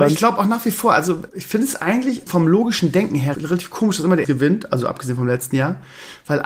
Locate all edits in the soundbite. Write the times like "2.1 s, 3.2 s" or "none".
1.3 s, 2.3 s, 3.3 s, 4.2 s